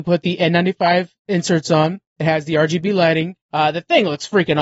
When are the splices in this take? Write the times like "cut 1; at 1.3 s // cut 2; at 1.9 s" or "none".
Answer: cut 1; at 3.4 s